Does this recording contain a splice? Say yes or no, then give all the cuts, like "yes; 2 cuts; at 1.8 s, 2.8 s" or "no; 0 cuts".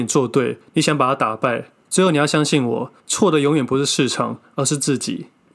yes; 1 cut; at 3.0 s